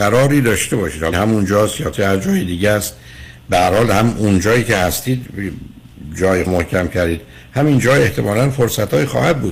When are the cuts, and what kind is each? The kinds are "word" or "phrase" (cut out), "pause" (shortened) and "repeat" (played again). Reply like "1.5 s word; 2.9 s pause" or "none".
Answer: 1.1 s word; 1.9 s word; 6.5 s phrase

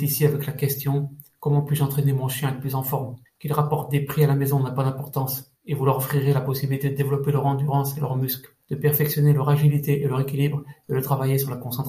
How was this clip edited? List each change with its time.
3.3 s pause; 5.6 s pause; 8.6 s pause

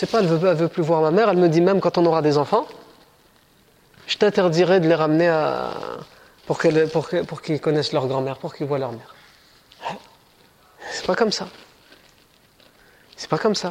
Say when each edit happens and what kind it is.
none

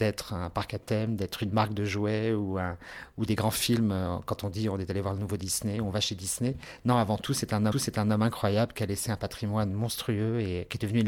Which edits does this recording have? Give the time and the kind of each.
7.7 s repeat

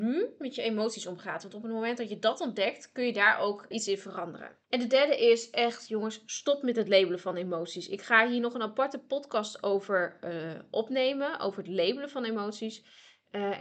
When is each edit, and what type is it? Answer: 3.7 s word; 4.6 s pause

